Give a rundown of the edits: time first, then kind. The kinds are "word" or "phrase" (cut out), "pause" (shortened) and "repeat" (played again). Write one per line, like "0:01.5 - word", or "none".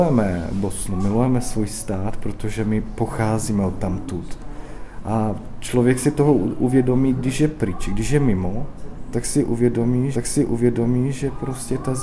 0:10.1 - repeat